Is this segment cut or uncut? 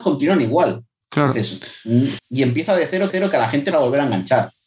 cut